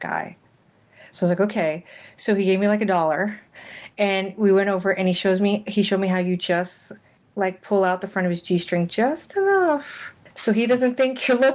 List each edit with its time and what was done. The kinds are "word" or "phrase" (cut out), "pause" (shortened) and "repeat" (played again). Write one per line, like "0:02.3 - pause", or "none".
none